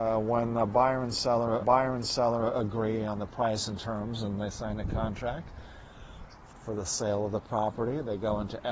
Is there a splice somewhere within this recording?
yes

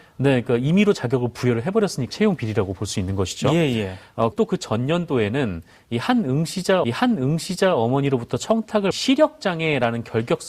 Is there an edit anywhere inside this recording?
yes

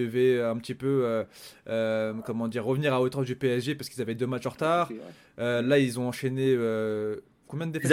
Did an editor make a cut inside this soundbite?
no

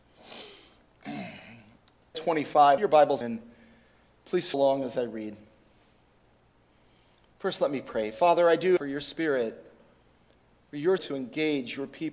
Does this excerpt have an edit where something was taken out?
yes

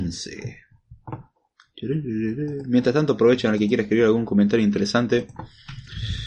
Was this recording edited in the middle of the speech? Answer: no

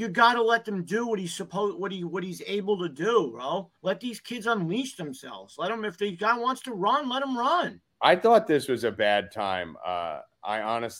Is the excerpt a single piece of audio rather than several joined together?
no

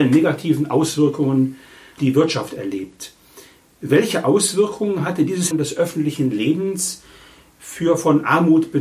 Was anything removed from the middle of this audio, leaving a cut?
yes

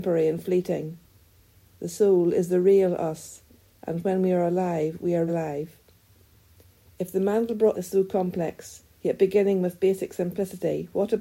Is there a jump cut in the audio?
yes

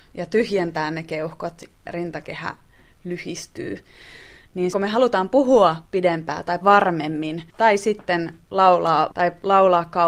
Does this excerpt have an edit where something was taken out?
yes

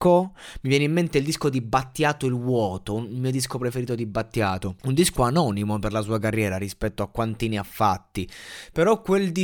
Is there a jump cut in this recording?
yes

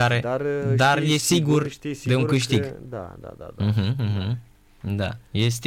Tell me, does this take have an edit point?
no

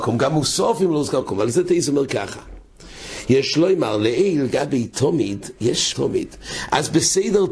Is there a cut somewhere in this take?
yes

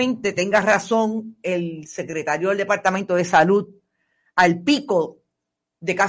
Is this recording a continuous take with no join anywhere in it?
yes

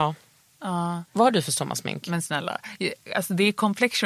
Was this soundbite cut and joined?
yes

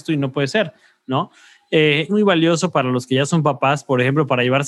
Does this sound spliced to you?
yes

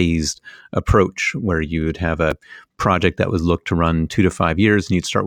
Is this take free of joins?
yes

